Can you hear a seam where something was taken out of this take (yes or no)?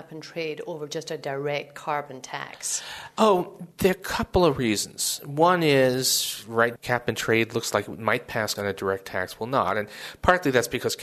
yes